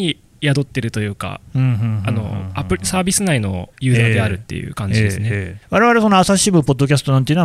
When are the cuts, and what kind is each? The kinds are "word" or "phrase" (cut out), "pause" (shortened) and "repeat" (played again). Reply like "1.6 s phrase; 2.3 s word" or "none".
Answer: 3.7 s pause; 5.6 s pause